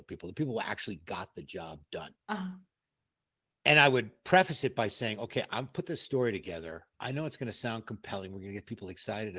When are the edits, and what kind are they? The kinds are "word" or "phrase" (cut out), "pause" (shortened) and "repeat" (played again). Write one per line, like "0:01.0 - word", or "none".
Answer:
0:02.2 - pause
0:06.9 - pause